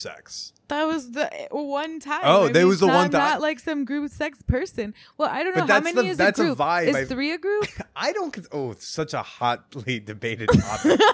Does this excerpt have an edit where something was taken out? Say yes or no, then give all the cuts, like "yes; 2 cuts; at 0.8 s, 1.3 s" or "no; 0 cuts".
no; 0 cuts